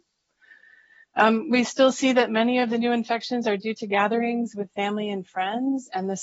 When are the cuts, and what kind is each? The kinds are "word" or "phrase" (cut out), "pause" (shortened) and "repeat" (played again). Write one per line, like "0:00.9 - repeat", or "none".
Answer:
none